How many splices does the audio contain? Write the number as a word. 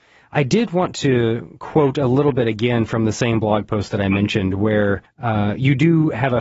one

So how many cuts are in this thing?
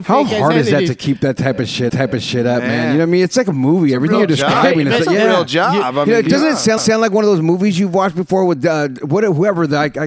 two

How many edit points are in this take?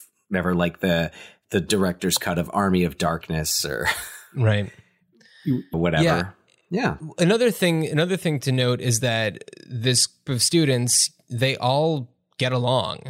two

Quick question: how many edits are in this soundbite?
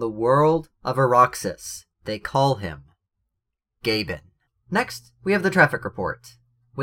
two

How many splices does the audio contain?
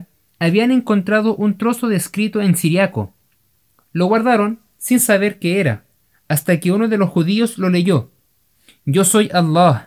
zero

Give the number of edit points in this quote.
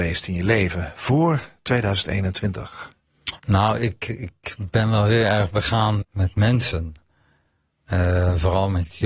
two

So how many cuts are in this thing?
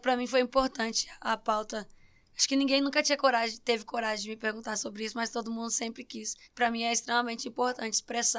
one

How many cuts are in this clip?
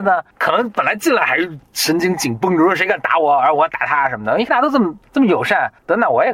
one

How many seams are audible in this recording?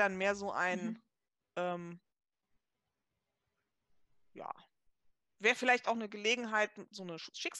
zero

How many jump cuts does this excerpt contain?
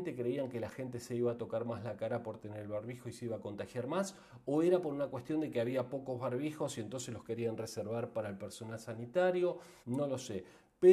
one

